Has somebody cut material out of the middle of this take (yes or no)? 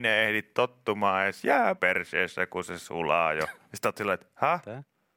yes